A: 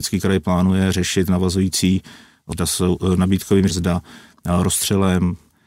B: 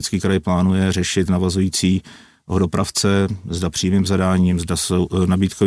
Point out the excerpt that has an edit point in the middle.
A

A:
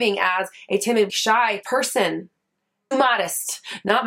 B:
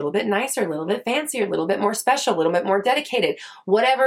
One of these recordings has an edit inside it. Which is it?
A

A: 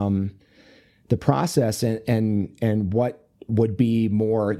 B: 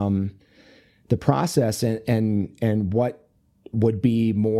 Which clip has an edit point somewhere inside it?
A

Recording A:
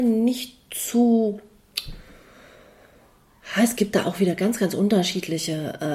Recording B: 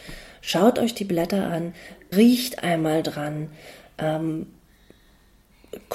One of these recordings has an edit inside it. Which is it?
B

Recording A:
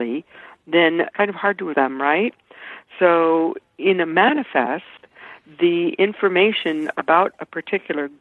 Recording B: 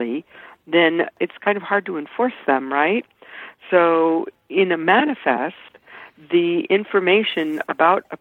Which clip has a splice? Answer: A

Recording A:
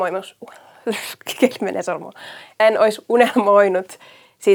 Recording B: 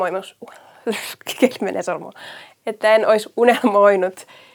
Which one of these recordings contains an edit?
A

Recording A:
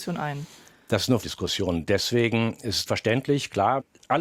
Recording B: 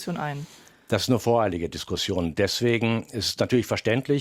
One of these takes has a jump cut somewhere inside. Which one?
A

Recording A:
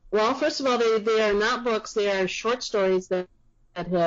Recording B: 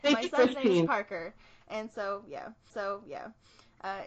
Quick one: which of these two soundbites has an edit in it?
B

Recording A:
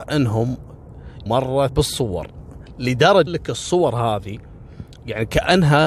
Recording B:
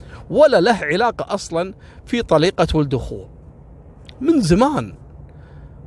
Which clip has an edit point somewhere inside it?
A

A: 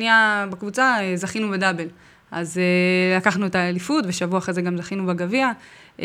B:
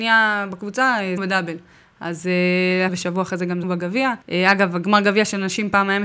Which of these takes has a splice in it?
B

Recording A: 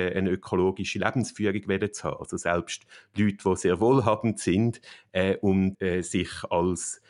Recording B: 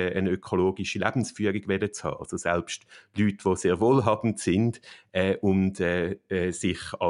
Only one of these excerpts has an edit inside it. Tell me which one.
A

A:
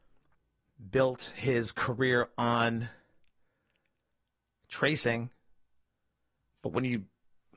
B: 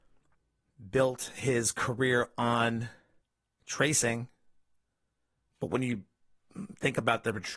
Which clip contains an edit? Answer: B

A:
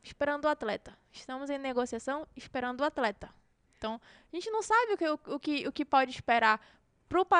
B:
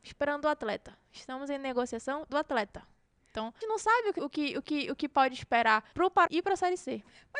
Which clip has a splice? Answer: B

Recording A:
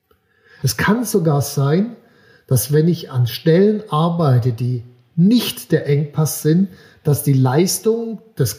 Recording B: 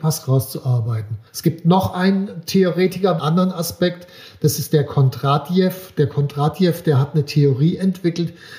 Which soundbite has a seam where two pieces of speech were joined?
B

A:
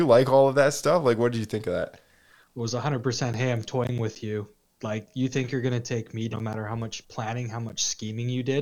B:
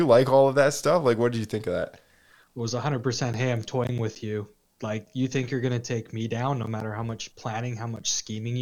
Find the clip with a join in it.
A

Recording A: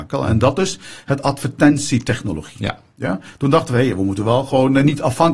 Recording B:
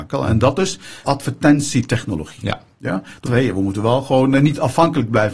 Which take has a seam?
B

